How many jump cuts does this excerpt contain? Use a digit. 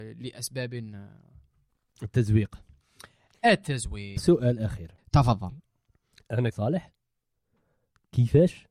3